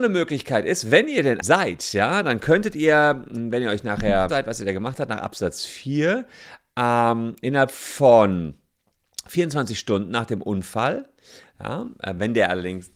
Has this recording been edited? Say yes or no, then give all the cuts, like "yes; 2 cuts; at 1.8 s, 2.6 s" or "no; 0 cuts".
yes; 2 cuts; at 1.4 s, 4.3 s